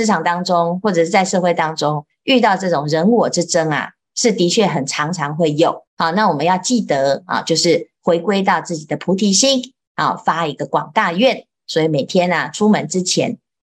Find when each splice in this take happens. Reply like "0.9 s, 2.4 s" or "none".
5.9 s